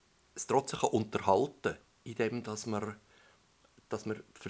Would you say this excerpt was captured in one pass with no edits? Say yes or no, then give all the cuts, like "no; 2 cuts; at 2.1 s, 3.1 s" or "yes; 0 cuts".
yes; 0 cuts